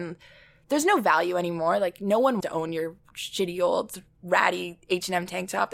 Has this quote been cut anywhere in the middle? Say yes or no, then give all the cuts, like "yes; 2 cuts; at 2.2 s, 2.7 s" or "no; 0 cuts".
yes; 1 cut; at 2.4 s